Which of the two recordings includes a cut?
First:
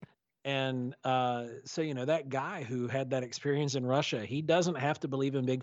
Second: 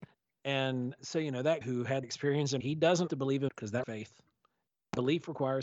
second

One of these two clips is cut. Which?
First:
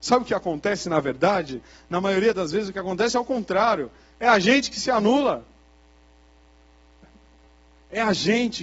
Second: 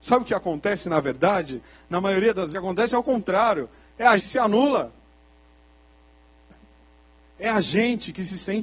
second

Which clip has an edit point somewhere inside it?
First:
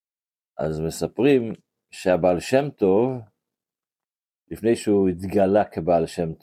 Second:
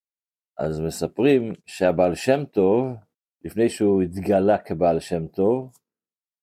second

